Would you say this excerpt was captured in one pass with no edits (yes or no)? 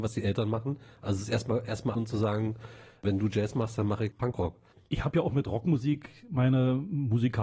no